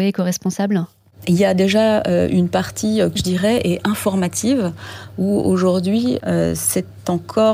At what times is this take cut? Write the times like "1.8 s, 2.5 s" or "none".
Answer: 3.2 s